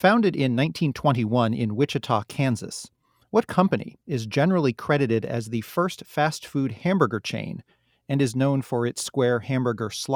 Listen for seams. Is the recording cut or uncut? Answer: uncut